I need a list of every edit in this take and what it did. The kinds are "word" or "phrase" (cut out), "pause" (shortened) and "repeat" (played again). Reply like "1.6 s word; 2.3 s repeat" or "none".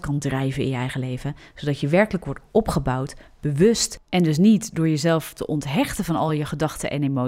none